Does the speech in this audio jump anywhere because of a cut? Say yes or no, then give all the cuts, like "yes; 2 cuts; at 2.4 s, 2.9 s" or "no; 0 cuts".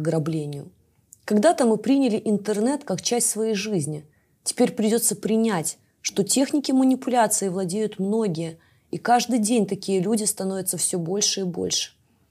no; 0 cuts